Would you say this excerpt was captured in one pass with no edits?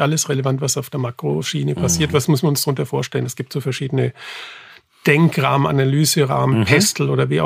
yes; 0 cuts

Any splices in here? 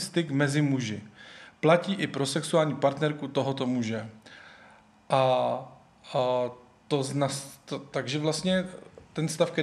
no; 0 cuts

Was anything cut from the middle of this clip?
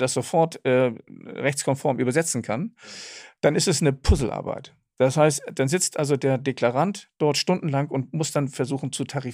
no; 0 cuts

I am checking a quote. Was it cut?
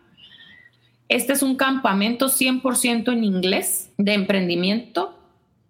yes; 1 cut; at 3.9 s

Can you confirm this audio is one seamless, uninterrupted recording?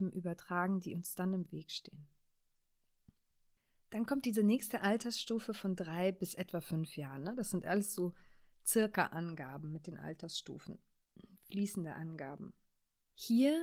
yes; 0 cuts

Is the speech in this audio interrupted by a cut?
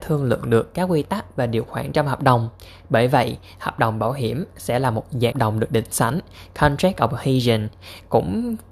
yes; 1 cut; at 5.3 s

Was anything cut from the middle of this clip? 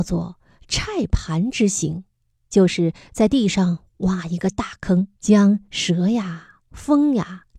yes; 1 cut; at 5.1 s

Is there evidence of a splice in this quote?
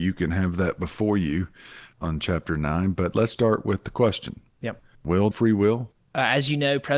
yes; 4 cuts; at 1.9 s, 3.3 s, 4.5 s, 5.3 s

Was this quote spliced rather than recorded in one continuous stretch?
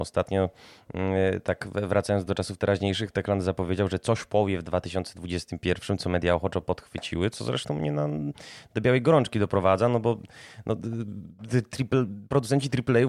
no; 0 cuts

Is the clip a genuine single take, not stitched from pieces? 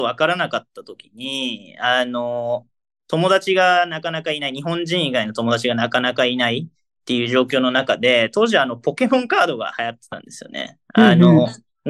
yes; 0 cuts

